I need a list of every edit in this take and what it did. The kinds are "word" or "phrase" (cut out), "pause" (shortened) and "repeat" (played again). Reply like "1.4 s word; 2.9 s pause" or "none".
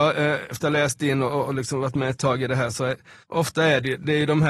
3.2 s pause

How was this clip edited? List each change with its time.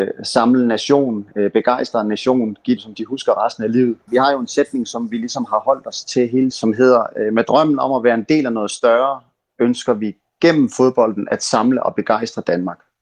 2.8 s phrase; 4.0 s pause; 6.5 s word

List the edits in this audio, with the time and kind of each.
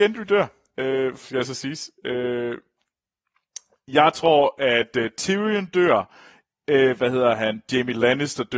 none

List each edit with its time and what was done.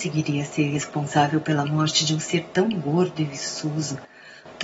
none

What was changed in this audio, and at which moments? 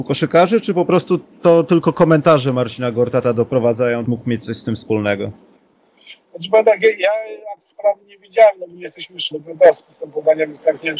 4.0 s phrase; 9.3 s word

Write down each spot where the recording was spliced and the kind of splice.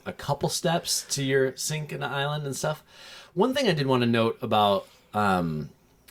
none

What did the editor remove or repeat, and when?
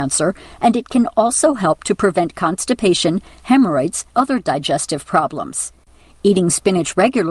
4.1 s word

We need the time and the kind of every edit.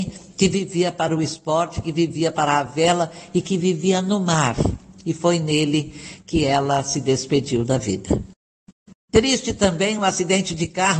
none

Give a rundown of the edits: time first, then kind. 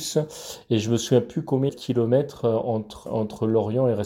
1.7 s phrase; 3.1 s word

